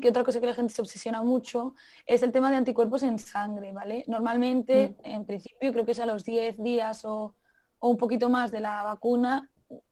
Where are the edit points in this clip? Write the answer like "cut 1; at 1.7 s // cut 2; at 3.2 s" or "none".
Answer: none